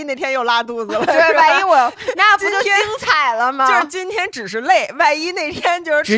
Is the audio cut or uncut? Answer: uncut